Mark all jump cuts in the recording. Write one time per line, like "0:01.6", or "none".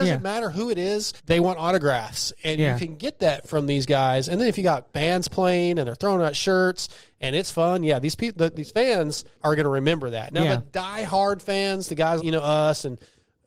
0:01.2
0:09.3
0:12.2